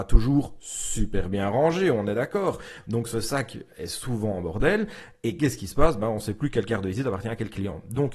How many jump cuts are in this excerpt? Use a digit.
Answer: 0